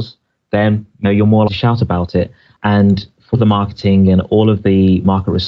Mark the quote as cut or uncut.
cut